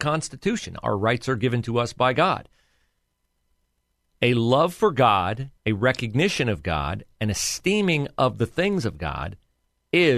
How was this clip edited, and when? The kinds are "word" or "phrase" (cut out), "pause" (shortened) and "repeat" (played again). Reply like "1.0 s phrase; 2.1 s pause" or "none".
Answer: 5.6 s pause